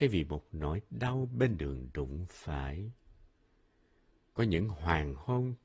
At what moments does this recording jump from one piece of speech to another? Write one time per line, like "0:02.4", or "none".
none

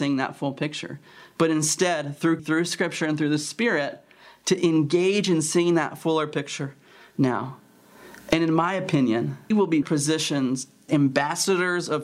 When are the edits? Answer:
0:02.4
0:09.5
0:09.8
0:10.9

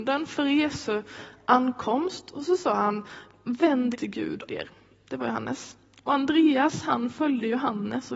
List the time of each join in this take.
0:03.9
0:04.5

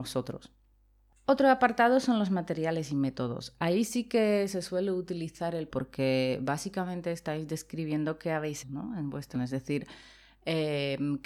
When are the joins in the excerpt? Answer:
0:05.7
0:08.6
0:09.3

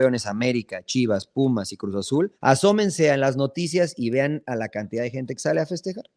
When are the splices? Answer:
0:02.3

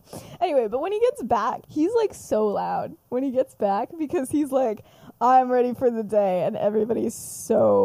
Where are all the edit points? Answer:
0:01.6

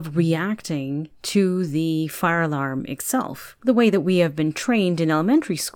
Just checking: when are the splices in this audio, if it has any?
none

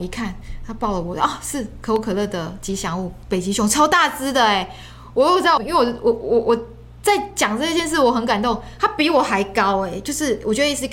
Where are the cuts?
0:05.6

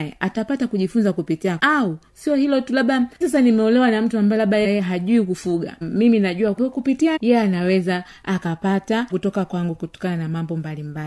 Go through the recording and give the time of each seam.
0:01.6
0:03.2
0:04.6
0:05.8
0:06.6
0:07.2
0:09.1

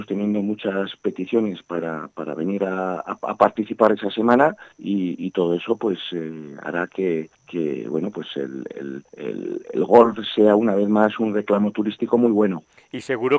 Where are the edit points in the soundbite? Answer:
0:04.7
0:07.3
0:09.1

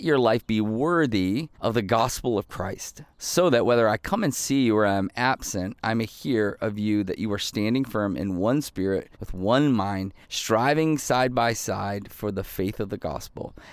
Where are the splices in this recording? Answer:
0:01.5
0:03.1
0:09.1
0:10.2

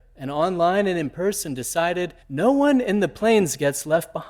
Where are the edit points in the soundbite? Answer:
0:02.2

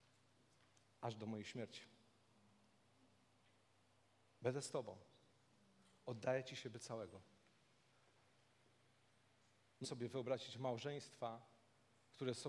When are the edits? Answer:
0:09.8

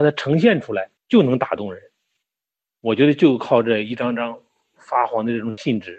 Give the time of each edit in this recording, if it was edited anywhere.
0:01.0

